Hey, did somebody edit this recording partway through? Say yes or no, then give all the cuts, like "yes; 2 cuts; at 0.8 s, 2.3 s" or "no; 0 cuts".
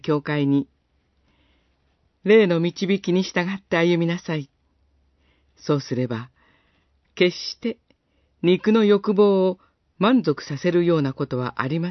no; 0 cuts